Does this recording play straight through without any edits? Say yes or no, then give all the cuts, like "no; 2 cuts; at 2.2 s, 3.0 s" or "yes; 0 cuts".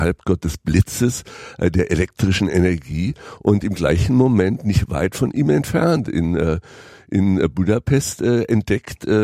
yes; 0 cuts